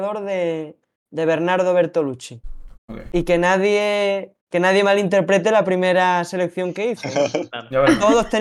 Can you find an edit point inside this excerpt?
yes; 2 cuts; at 2.8 s, 4.4 s

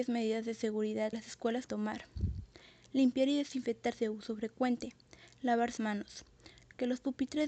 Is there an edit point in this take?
yes; 4 cuts; at 1.1 s, 1.7 s, 3.9 s, 5.8 s

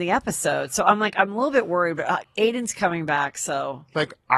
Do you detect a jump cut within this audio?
no; 0 cuts

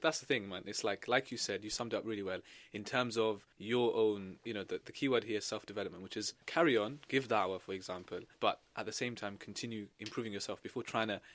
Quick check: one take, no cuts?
no; 3 cuts; at 3.5 s, 6.4 s, 8.3 s

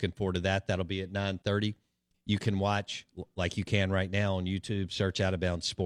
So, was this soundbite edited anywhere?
no; 0 cuts

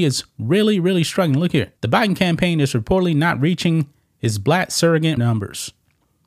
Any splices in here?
yes; 2 cuts; at 1.8 s, 5.2 s

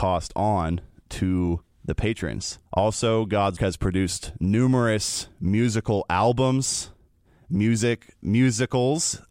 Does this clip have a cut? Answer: yes; 4 cuts; at 1.7 s, 2.7 s, 3.6 s, 8.2 s

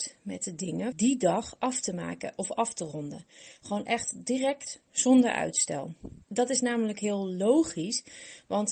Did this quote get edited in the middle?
yes; 2 cuts; at 0.9 s, 6.2 s

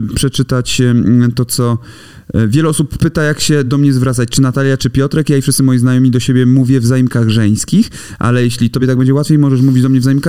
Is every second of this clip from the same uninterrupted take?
yes; 0 cuts

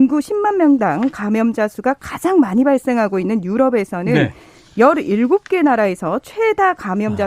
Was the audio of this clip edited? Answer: no; 0 cuts

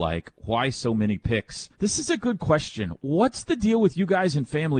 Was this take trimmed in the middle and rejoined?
yes; 1 cut; at 1.7 s

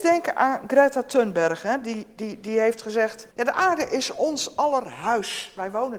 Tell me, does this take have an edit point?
yes; 1 cut; at 3.3 s

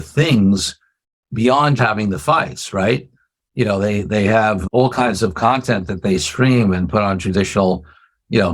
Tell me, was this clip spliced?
yes; 1 cut; at 1.8 s

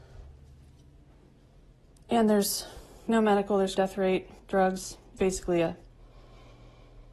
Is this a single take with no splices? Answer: no; 4 cuts; at 3.1 s, 3.8 s, 4.4 s, 5.2 s

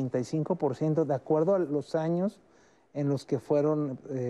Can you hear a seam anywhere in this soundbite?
no; 0 cuts

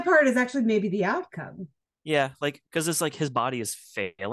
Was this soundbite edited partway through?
yes; 1 cut; at 2.6 s

